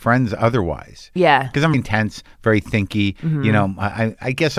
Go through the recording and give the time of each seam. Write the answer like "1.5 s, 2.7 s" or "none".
1.7 s